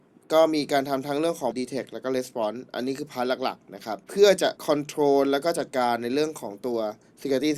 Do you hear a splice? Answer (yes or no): yes